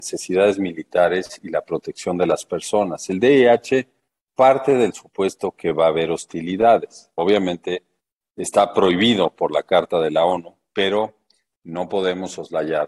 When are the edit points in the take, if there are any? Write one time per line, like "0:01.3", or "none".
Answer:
none